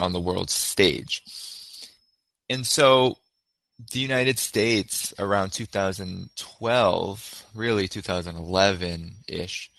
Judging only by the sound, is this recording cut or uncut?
uncut